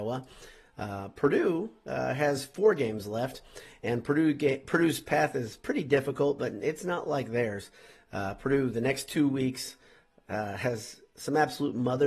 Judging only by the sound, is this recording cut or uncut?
uncut